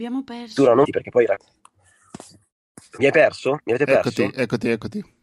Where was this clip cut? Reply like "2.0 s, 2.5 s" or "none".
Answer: none